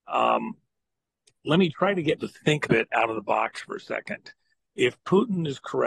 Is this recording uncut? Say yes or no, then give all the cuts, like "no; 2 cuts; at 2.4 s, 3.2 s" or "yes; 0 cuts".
no; 3 cuts; at 1.7 s, 2.2 s, 2.6 s